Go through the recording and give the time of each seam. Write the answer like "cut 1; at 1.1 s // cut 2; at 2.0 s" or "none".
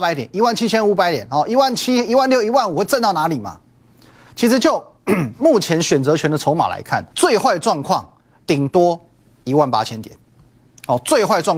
cut 1; at 7.1 s